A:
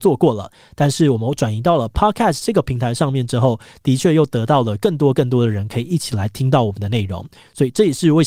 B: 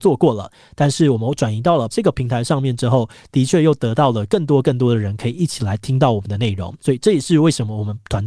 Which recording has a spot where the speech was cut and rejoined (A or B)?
B